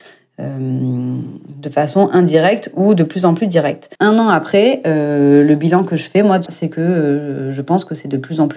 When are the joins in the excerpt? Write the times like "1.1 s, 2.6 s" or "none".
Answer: 3.9 s, 6.5 s

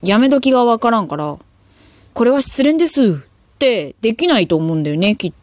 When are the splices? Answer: 2.1 s

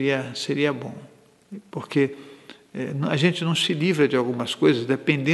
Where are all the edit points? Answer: none

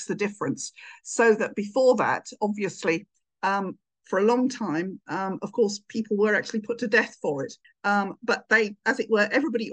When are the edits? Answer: none

